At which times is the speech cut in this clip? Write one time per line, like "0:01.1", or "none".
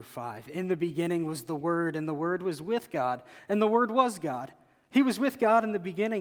none